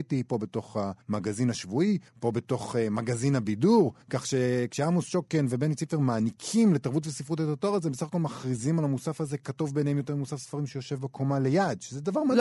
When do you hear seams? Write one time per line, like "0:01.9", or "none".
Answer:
0:01.0
0:02.1
0:04.0